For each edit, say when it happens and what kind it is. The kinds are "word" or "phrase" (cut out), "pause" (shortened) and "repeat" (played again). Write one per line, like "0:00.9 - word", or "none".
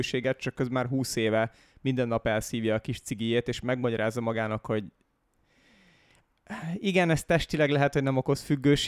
none